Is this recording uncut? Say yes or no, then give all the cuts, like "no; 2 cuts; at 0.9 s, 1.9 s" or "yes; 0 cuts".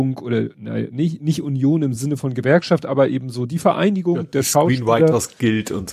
yes; 0 cuts